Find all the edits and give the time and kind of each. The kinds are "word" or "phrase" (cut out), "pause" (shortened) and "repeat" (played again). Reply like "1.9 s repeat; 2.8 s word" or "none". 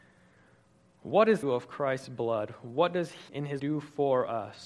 1.4 s phrase; 3.3 s word; 3.6 s word